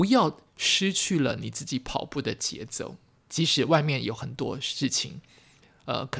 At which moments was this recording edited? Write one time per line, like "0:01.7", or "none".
none